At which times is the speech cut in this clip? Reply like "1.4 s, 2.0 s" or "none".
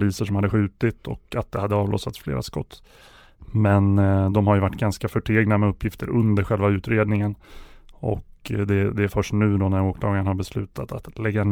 none